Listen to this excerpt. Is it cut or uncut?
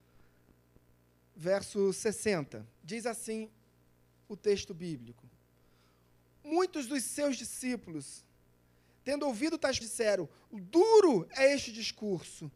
cut